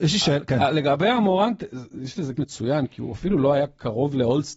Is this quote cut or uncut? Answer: cut